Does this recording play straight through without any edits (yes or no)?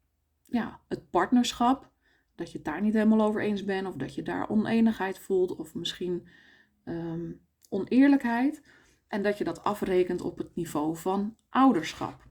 yes